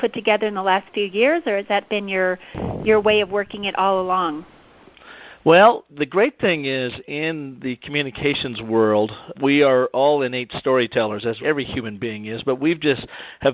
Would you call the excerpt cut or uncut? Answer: cut